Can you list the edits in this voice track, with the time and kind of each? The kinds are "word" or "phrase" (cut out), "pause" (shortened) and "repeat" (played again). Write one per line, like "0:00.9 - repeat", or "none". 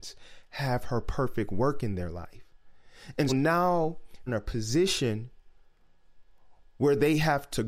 0:03.3 - word
0:04.3 - phrase

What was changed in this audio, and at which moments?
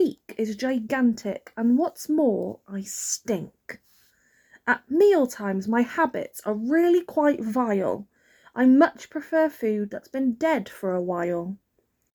none

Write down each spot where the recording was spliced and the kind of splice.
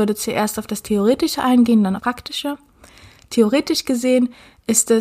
0:02.0 - phrase

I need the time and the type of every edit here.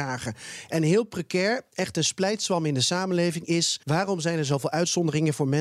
0:03.8 - pause

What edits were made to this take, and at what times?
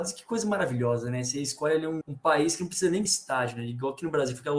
0:02.0 - word
0:03.1 - word

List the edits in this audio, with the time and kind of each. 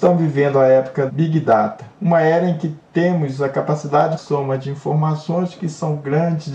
0:01.1 - word
0:01.9 - word
0:02.9 - pause
0:04.2 - phrase

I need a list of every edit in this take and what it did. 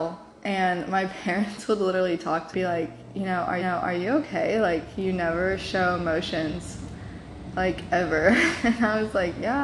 0:02.5 - phrase
0:03.6 - repeat

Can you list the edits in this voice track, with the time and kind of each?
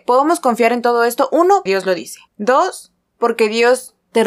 0:01.7 - word
0:02.3 - pause

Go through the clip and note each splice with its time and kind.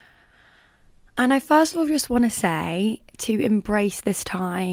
none

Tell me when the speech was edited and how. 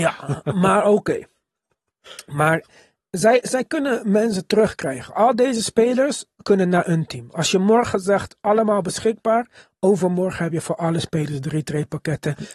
none

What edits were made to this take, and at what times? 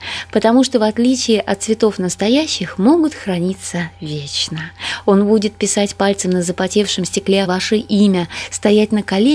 0:07.5 - word

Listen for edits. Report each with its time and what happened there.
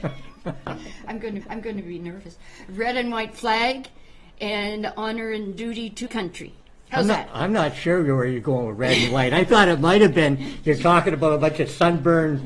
0:01.4 - repeat
0:06.1 - word

